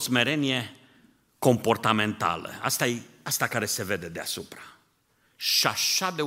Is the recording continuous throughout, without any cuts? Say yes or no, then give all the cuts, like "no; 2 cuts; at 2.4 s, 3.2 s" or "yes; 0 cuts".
yes; 0 cuts